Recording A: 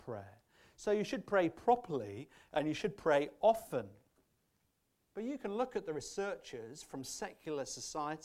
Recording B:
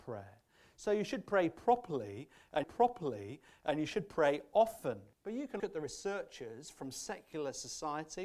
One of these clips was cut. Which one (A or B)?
B